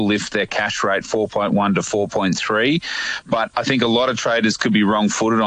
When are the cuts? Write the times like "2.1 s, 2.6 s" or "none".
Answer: 1.0 s